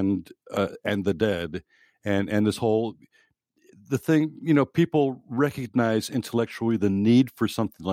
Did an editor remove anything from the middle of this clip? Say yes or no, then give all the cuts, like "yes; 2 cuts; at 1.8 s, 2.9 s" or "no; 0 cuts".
no; 0 cuts